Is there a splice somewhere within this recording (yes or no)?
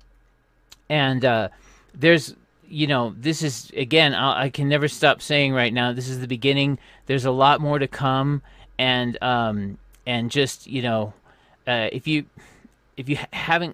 no